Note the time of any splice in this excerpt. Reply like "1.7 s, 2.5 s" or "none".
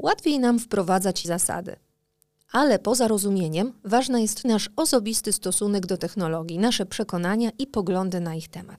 1.2 s, 4.4 s